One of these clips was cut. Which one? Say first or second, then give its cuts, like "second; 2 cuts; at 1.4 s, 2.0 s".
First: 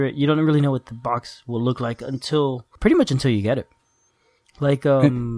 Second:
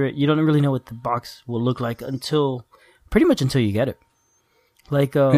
first; 1 cut; at 2.8 s